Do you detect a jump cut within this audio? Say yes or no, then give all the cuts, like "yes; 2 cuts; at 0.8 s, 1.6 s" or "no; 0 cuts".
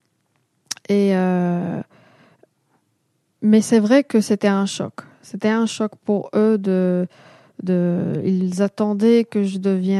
no; 0 cuts